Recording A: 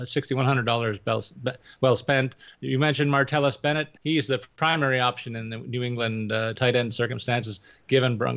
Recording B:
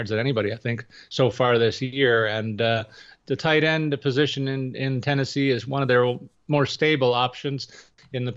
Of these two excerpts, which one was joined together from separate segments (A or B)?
A